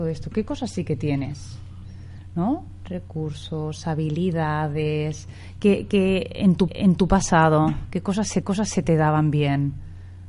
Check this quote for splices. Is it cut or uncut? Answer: cut